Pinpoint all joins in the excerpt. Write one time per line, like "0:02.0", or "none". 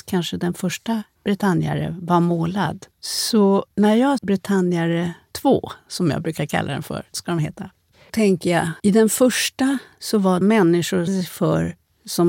0:02.9
0:04.2
0:07.1
0:08.1
0:08.8
0:10.4
0:11.1